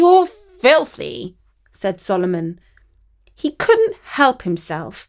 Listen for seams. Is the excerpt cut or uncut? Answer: uncut